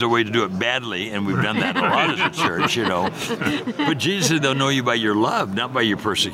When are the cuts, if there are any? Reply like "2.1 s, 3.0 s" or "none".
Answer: none